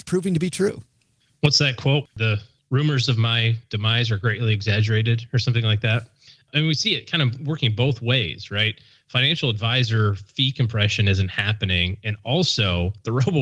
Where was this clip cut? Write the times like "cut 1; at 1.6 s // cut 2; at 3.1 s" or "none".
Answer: none